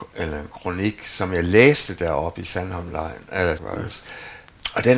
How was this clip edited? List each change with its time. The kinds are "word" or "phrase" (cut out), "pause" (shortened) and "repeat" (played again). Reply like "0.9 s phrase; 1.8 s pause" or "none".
3.6 s word